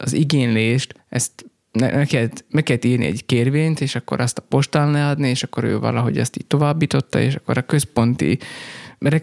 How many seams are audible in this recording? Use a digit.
0